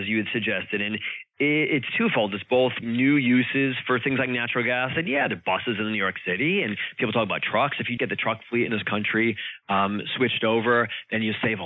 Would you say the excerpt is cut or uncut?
cut